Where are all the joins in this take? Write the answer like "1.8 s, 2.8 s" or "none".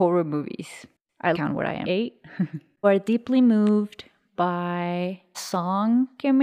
1.3 s, 1.8 s, 2.8 s, 5.3 s